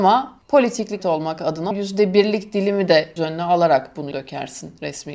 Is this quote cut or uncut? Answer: cut